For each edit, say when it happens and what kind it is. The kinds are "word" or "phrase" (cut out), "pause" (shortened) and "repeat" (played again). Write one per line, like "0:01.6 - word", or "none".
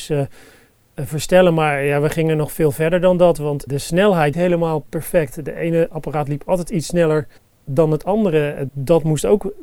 0:03.7 - word
0:04.3 - phrase
0:07.4 - pause
0:08.7 - word